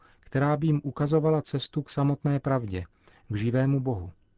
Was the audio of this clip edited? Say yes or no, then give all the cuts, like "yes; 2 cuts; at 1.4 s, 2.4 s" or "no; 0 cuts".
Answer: no; 0 cuts